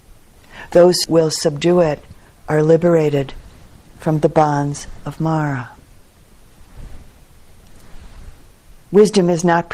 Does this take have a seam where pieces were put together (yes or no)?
yes